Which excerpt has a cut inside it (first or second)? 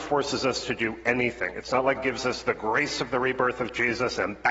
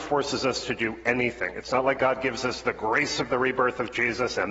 first